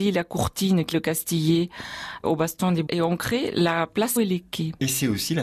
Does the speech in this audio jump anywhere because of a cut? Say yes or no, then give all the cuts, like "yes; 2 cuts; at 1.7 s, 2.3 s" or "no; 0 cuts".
yes; 4 cuts; at 0.9 s, 2.2 s, 2.9 s, 4.2 s